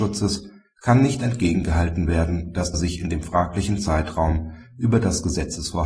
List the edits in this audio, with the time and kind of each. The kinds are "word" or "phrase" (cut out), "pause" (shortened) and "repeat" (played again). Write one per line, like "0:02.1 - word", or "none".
0:02.7 - phrase